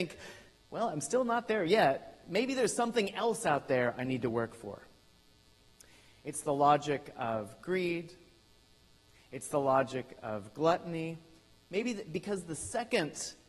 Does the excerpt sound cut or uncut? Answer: uncut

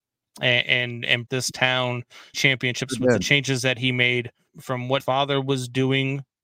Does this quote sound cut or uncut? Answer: cut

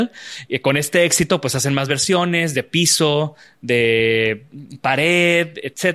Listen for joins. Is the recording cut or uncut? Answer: uncut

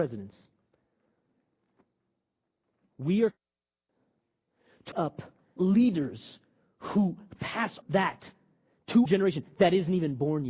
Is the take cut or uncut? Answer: cut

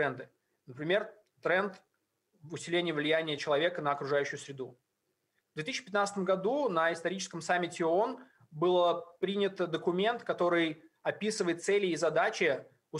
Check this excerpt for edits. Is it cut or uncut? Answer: uncut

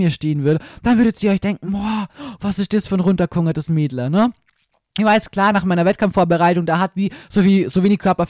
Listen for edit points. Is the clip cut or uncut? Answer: uncut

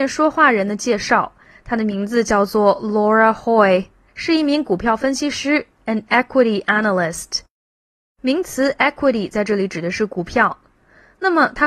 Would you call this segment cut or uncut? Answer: uncut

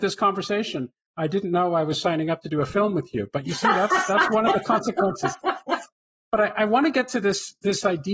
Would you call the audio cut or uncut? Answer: uncut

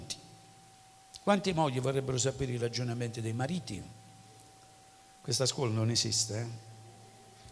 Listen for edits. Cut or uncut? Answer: uncut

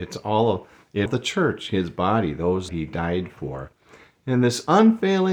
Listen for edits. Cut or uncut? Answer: cut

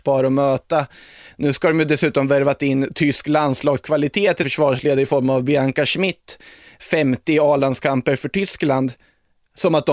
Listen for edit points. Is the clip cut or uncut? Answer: cut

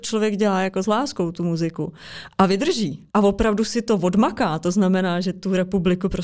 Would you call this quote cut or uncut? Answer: cut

